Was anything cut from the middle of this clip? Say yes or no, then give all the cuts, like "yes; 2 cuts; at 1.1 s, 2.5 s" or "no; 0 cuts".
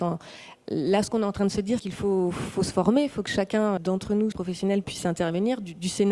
yes; 4 cuts; at 1.8 s, 3.8 s, 4.3 s, 4.8 s